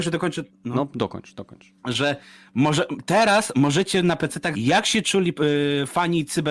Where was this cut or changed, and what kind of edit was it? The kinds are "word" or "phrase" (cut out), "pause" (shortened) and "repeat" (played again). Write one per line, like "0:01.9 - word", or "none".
0:01.8 - pause
0:04.5 - word

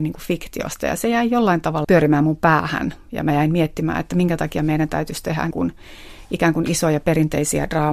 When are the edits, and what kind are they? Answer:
0:01.8 - word
0:05.5 - word

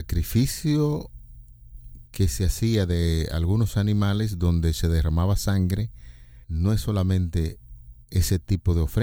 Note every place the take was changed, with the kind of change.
0:06.4 - pause

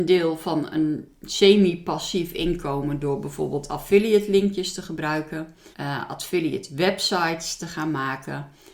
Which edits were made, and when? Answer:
0:05.7 - pause

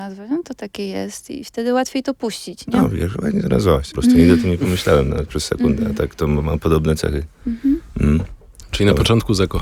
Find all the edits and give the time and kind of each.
0:03.9 - phrase

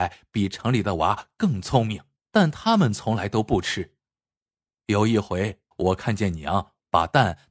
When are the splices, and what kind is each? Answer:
0:02.2 - pause
0:05.7 - pause

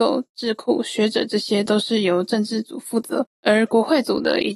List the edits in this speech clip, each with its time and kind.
0:03.3 - pause

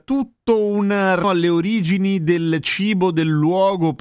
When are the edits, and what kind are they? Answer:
0:01.2 - word

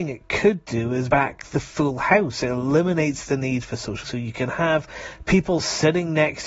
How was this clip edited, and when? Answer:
0:01.1 - word
0:04.0 - word

